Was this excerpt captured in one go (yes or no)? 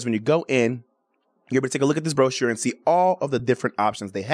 yes